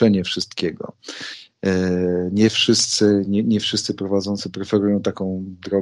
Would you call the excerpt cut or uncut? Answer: uncut